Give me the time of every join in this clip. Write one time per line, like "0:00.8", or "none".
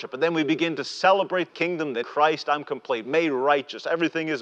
0:01.5
0:02.0